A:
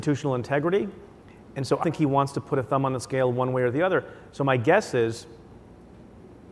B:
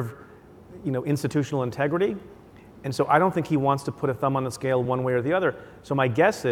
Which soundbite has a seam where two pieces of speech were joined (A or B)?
A